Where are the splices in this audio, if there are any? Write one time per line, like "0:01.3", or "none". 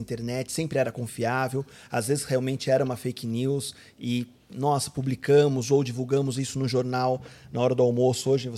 none